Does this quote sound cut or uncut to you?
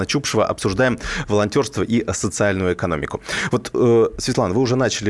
uncut